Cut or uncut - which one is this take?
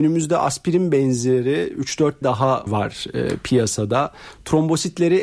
cut